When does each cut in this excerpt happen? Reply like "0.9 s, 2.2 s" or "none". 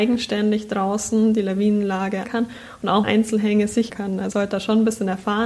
2.2 s, 3.0 s, 3.9 s, 4.3 s